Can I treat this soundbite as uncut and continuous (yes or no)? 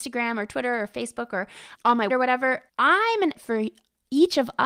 no